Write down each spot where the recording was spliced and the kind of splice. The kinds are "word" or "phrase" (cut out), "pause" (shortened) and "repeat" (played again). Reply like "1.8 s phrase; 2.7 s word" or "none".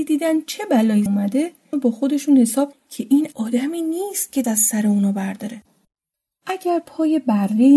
1.1 s word; 1.7 s word; 2.7 s word; 3.3 s word; 4.4 s word